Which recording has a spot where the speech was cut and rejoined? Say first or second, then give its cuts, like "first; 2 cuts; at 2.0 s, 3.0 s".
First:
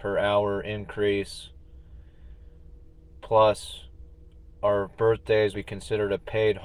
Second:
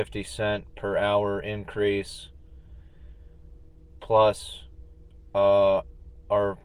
first; 2 cuts; at 4.5 s, 5.5 s